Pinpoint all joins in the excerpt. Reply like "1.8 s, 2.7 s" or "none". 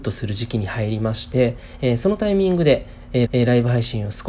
3.3 s